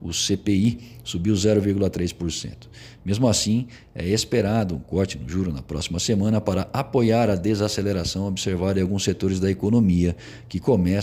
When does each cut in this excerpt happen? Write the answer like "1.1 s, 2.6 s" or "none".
none